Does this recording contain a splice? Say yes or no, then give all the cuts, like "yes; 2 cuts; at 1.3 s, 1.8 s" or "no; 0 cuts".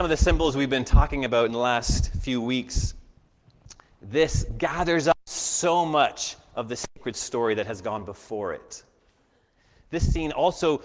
no; 0 cuts